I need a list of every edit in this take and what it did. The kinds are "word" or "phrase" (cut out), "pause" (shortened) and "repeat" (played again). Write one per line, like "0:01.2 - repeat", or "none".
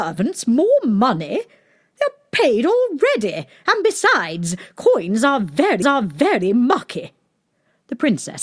0:05.8 - repeat